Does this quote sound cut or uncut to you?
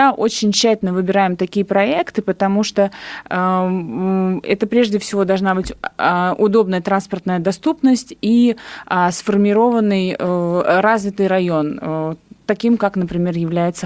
uncut